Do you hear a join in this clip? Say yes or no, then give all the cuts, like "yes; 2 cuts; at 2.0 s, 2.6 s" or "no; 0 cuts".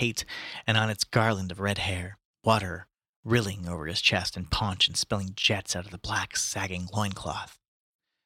no; 0 cuts